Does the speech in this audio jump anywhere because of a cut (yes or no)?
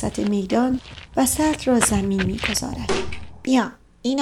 no